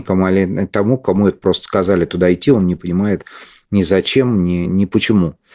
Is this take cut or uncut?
uncut